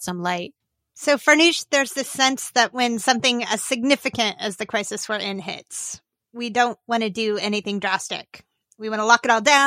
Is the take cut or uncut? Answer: uncut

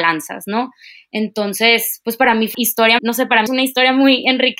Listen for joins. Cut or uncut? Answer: cut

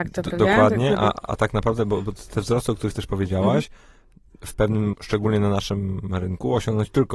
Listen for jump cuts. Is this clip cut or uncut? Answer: cut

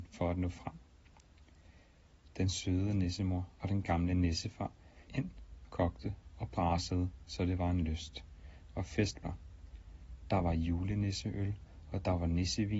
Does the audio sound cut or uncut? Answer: cut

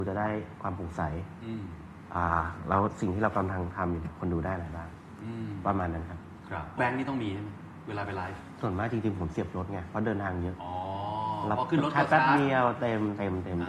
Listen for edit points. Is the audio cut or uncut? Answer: cut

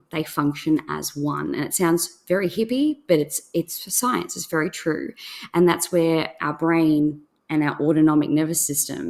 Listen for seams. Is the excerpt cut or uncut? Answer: uncut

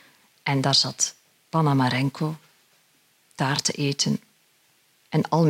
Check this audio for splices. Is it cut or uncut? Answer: uncut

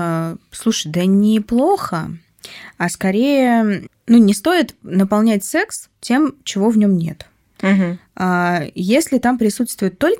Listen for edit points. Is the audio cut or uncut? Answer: uncut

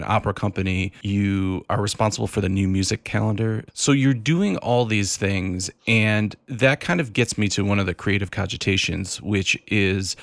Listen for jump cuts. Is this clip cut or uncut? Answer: uncut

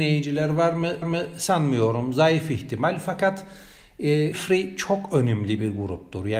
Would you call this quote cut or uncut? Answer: cut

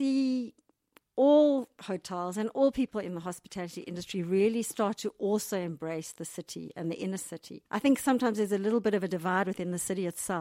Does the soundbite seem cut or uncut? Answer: cut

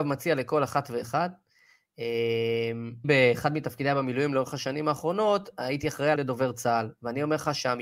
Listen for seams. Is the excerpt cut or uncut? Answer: cut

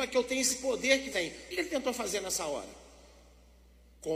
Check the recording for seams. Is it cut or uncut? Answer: cut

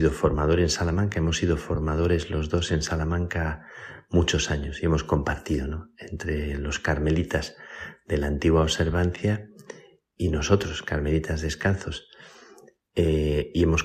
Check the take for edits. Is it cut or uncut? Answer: uncut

